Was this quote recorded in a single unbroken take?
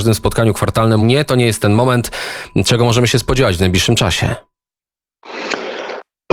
no; 1 cut; at 1.0 s

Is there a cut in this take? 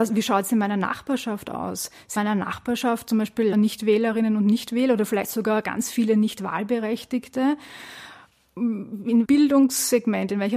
yes; 3 cuts; at 2.2 s, 3.5 s, 9.2 s

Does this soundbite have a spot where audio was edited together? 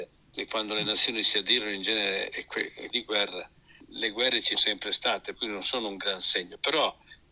yes; 3 cuts; at 2.9 s, 4.5 s, 5.3 s

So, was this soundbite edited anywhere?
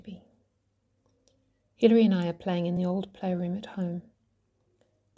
no; 0 cuts

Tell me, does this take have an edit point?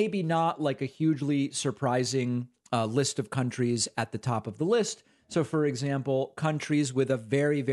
no; 0 cuts

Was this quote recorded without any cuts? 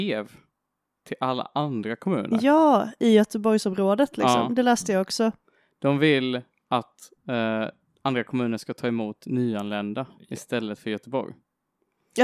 yes; 0 cuts

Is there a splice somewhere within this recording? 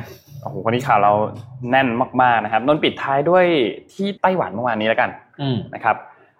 yes; 1 cut; at 4.2 s

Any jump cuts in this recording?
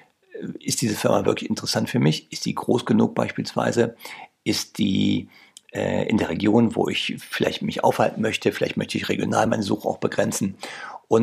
no; 0 cuts

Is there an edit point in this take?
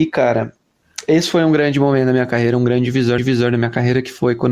yes; 1 cut; at 3.2 s

